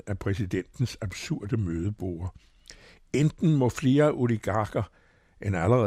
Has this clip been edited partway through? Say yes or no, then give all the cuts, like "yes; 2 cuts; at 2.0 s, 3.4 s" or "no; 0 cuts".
no; 0 cuts